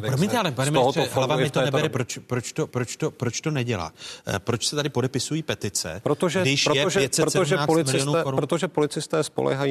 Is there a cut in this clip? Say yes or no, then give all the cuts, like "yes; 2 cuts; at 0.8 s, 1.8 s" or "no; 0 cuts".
yes; 2 cuts; at 1.9 s, 2.7 s